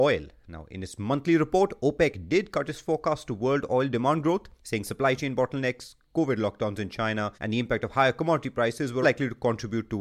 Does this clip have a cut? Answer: yes; 3 cuts; at 4.6 s, 7.3 s, 9.0 s

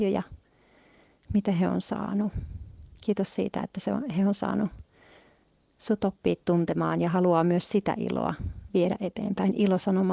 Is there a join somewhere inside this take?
no; 0 cuts

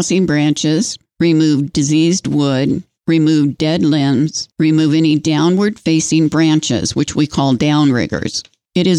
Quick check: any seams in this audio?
no; 0 cuts

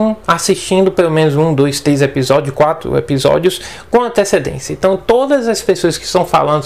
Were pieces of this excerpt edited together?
no; 0 cuts

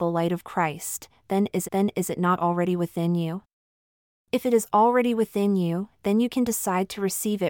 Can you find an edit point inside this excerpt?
yes; 1 cut; at 1.6 s

